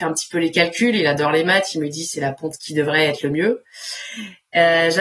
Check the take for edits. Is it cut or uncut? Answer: cut